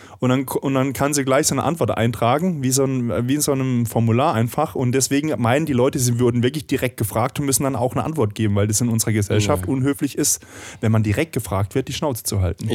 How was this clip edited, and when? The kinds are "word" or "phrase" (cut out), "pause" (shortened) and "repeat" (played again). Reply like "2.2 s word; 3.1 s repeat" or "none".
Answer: none

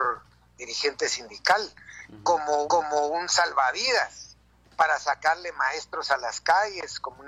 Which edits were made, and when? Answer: 2.6 s repeat

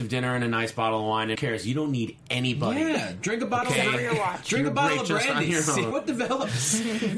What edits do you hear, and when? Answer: 1.4 s word; 5.9 s word

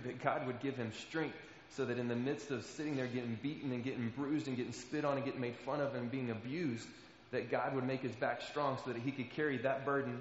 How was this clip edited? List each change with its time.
none

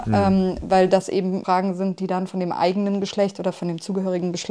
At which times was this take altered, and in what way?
none

